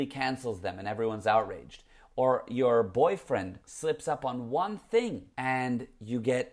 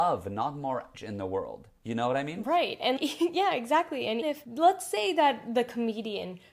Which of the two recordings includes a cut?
second; 3 cuts; at 0.9 s, 3.0 s, 4.2 s

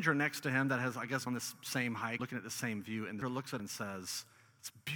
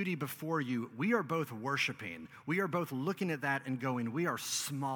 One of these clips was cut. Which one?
first; 4 cuts; at 1.3 s, 2.2 s, 3.2 s, 3.6 s

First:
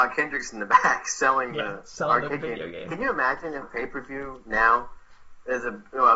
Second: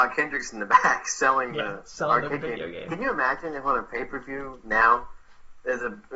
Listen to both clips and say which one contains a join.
first; 1 cut; at 3.6 s

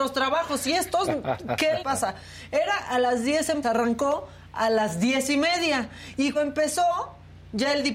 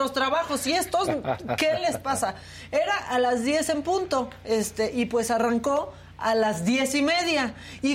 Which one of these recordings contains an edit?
first; 3 cuts; at 1.8 s, 3.6 s, 6.3 s

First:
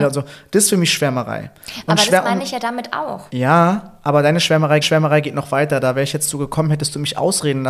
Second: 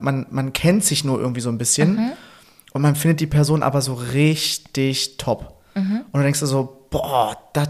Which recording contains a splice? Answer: first; 2 cuts; at 3.3 s, 4.8 s

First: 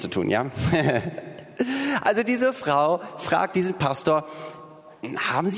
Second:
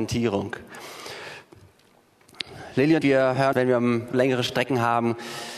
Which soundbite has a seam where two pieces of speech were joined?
second; 3 cuts; at 3.0 s, 3.5 s, 4.1 s

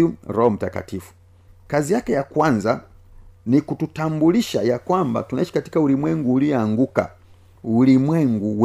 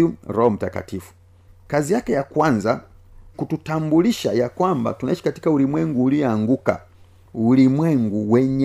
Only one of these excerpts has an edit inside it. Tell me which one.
second; 1 cut; at 3.3 s

